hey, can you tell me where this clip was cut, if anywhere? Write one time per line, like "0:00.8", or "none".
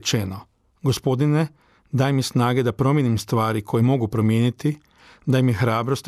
none